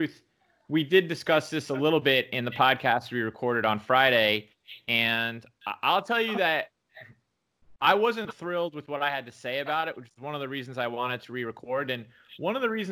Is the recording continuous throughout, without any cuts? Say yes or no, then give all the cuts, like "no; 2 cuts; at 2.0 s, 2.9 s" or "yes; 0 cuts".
yes; 0 cuts